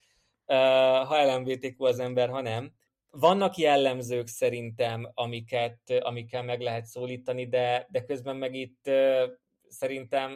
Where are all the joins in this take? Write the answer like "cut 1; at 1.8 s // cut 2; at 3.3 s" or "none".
none